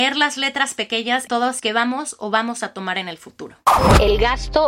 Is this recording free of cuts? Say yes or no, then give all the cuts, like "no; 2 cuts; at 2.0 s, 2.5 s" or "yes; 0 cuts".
no; 2 cuts; at 1.3 s, 1.6 s